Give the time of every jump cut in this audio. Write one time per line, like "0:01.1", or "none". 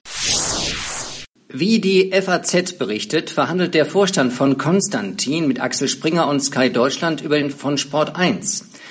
0:07.5